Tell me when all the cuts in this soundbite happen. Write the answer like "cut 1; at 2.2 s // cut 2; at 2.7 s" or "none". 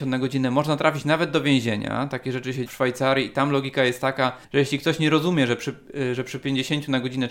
cut 1; at 2.7 s // cut 2; at 4.4 s